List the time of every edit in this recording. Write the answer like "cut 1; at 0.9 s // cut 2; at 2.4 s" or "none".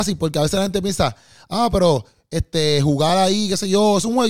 none